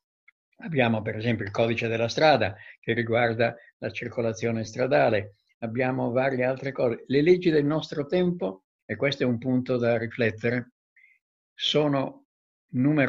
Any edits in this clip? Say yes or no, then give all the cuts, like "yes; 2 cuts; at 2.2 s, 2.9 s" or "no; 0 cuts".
no; 0 cuts